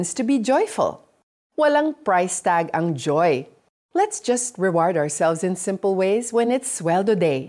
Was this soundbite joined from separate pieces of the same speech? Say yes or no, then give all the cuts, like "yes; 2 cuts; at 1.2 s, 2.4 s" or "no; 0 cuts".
no; 0 cuts